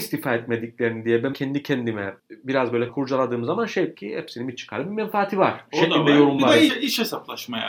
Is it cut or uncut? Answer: cut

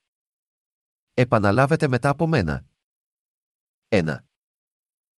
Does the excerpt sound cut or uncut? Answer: uncut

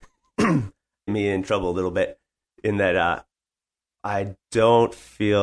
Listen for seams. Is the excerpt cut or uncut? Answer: cut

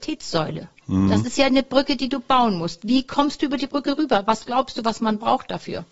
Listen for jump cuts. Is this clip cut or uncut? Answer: uncut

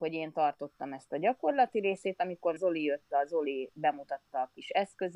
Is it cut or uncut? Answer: cut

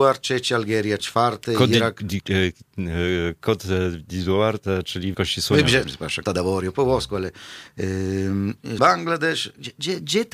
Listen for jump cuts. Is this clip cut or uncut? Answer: cut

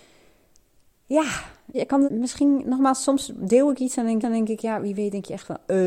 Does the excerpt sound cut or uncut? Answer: cut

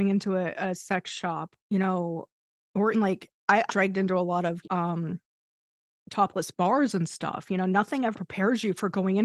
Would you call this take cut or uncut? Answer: cut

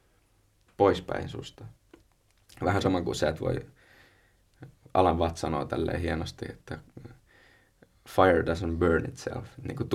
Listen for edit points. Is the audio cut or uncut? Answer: uncut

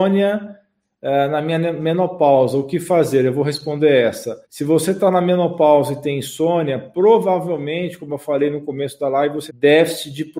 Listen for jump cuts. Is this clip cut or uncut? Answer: cut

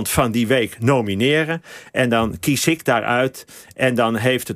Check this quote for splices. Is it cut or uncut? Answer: uncut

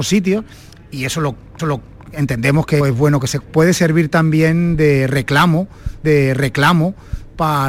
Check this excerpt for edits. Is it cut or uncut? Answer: cut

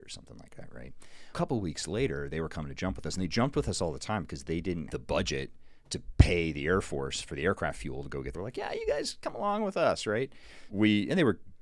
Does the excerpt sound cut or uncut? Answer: cut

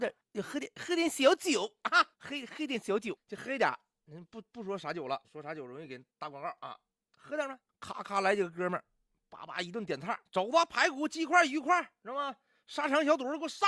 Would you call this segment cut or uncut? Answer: cut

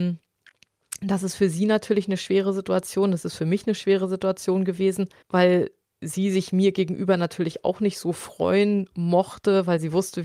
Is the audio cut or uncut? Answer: cut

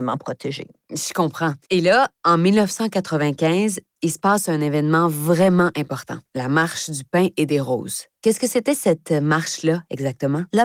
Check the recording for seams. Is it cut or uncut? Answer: cut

